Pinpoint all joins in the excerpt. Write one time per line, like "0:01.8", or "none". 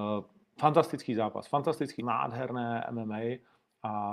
0:02.0

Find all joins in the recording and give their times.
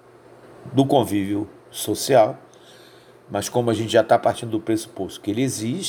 0:01.6

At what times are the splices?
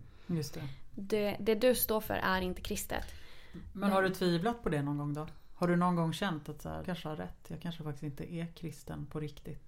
0:06.8

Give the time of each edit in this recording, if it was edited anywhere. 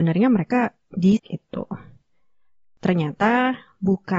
0:01.2

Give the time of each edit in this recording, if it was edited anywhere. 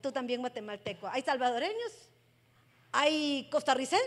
0:02.5

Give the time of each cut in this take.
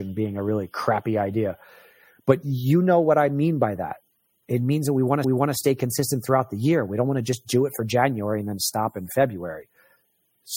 0:05.2

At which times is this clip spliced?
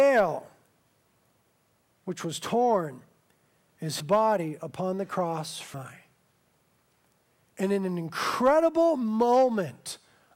0:04.0
0:05.7

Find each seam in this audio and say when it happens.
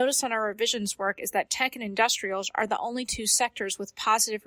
none

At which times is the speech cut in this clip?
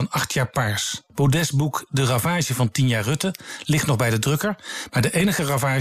0:01.1

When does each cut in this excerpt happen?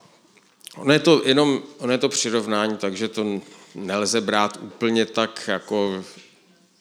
none

